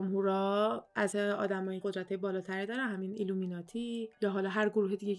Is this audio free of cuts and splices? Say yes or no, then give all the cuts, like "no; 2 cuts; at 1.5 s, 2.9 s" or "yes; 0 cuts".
no; 2 cuts; at 1.1 s, 1.8 s